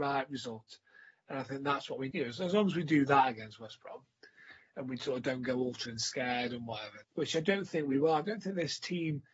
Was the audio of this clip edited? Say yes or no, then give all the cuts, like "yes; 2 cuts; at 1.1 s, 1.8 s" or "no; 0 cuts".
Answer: yes; 3 cuts; at 2.1 s, 5.9 s, 7.0 s